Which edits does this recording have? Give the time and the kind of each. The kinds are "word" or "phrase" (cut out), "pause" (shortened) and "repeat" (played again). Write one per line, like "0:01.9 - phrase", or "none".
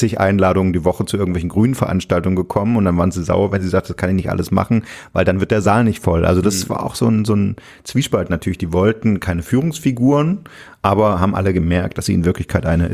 none